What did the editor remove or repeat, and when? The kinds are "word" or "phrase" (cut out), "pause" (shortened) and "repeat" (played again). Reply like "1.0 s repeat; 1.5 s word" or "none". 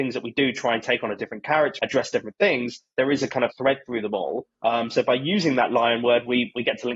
1.8 s word; 3.5 s word; 4.5 s pause